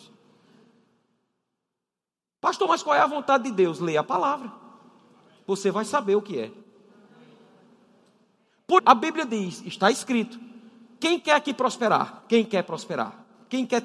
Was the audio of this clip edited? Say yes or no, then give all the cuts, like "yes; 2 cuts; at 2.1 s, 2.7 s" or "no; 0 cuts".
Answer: yes; 1 cut; at 8.8 s